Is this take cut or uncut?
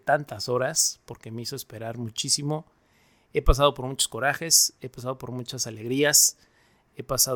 uncut